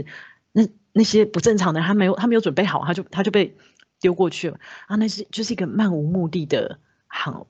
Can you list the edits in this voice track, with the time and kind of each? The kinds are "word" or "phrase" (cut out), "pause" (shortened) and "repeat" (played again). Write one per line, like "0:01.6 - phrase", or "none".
none